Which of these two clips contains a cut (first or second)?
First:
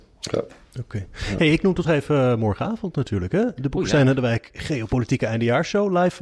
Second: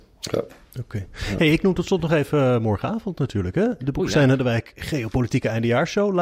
first